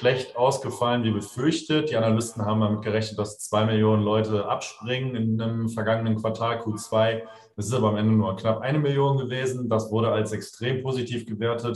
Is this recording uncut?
yes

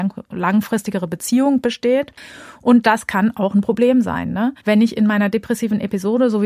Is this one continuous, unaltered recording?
no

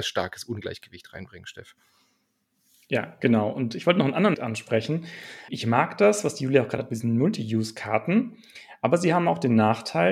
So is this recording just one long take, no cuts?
no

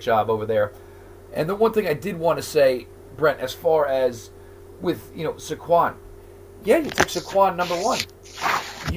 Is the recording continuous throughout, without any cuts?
yes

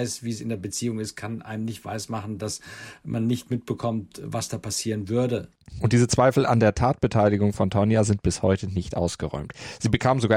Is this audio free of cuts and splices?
yes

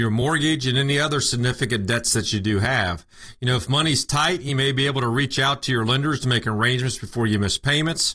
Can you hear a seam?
no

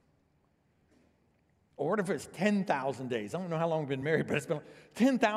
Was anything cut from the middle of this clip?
no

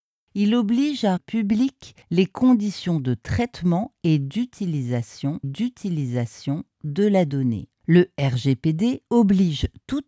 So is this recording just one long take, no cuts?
no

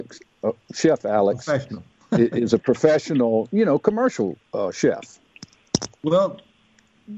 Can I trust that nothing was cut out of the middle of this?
yes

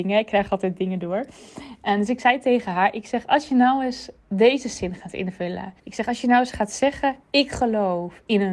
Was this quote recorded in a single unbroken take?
no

